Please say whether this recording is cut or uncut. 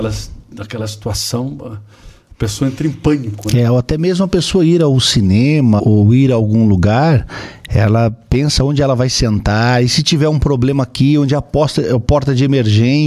cut